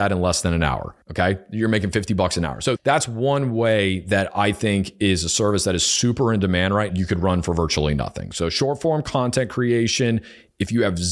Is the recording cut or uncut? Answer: cut